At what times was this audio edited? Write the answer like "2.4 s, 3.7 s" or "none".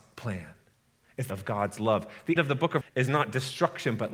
1.3 s, 2.4 s, 2.8 s

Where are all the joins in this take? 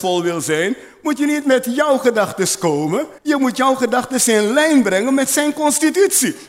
3.2 s

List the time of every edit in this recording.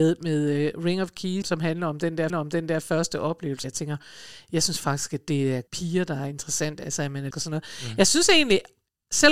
1.4 s, 2.3 s, 3.6 s, 5.7 s, 7.3 s

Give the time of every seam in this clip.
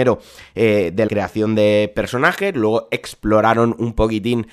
1.1 s

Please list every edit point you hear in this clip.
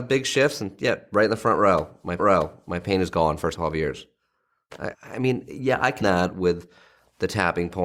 2.2 s, 3.5 s, 4.9 s, 6.0 s

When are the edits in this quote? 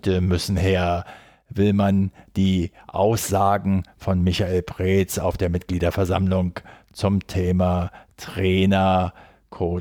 none

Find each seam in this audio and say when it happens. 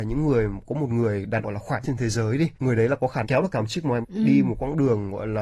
1.4 s, 1.8 s, 2.5 s, 3.2 s, 4.0 s

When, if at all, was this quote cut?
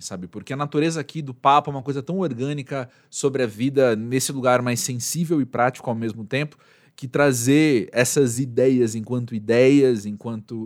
none

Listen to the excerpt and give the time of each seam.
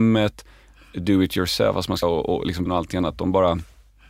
2.0 s, 2.7 s

